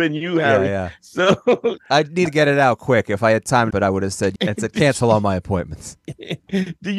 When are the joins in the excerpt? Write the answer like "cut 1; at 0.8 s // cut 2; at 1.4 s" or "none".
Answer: cut 1; at 1.8 s // cut 2; at 2.3 s // cut 3; at 3.7 s // cut 4; at 4.4 s